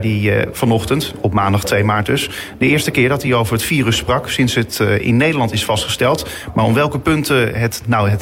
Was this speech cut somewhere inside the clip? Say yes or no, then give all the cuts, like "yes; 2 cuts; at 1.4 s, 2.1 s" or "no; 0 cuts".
no; 0 cuts